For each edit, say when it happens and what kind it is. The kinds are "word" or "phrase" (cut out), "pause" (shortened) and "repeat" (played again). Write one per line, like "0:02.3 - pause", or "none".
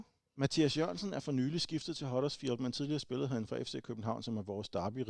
none